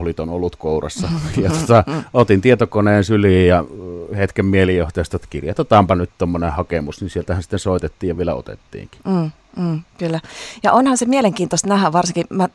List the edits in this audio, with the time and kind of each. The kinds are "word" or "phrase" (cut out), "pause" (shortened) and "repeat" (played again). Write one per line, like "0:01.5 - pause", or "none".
none